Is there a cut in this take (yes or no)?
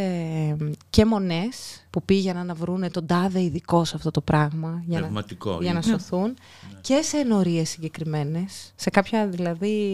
yes